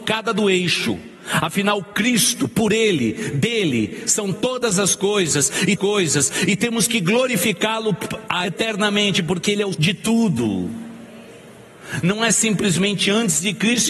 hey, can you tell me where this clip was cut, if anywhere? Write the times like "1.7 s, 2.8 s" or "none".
5.8 s, 8.4 s, 9.7 s